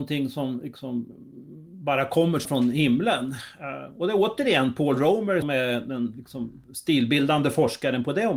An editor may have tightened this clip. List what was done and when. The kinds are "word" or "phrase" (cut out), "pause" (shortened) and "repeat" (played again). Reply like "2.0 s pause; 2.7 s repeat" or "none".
2.4 s word; 5.4 s word